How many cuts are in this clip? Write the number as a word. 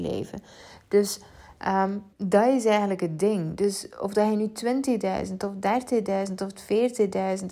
one